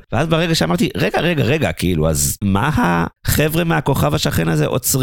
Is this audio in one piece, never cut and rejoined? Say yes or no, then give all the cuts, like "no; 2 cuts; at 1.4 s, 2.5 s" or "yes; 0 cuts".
yes; 0 cuts